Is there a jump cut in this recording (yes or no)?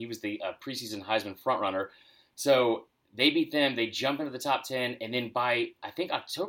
no